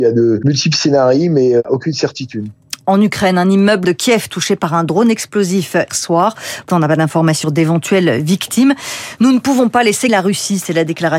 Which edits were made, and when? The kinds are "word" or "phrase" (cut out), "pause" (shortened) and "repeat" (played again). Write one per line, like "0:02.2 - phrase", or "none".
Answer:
0:03.8 - word
0:05.9 - word
0:06.7 - word
0:07.4 - word
0:10.1 - word